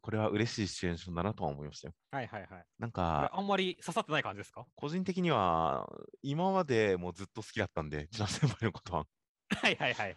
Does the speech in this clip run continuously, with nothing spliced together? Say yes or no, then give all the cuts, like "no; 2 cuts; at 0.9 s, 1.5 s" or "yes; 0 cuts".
no; 3 cuts; at 2.0 s, 2.7 s, 4.7 s